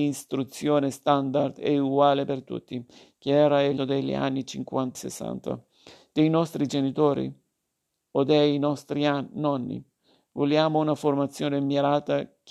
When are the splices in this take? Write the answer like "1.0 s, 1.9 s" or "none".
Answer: 3.8 s, 4.9 s